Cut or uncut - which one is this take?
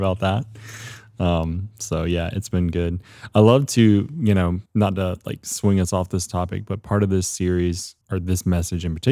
cut